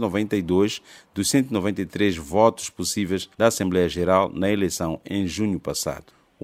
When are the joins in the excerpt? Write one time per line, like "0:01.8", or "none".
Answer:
0:03.3

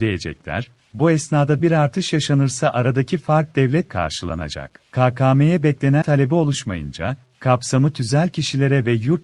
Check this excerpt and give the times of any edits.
0:01.6
0:03.9
0:04.9
0:06.0

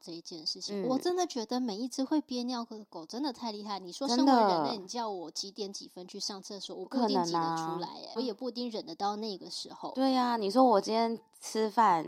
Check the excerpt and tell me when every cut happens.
0:08.2

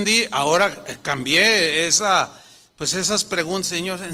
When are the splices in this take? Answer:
none

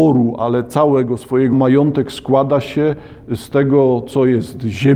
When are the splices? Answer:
0:01.5

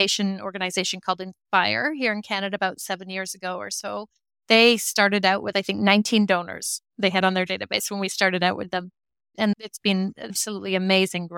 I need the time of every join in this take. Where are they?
none

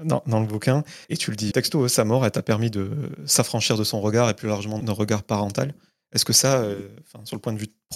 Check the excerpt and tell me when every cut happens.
0:01.0
0:01.5
0:04.8

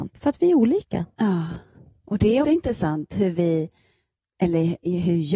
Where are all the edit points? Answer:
0:02.4

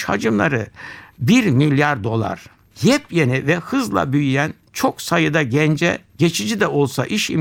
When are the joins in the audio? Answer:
none

